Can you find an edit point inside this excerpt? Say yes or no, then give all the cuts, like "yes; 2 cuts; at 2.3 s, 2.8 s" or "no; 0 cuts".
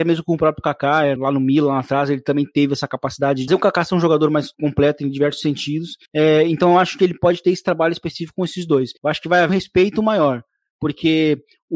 yes; 6 cuts; at 1.2 s, 3.5 s, 4.5 s, 6.0 s, 9.0 s, 9.5 s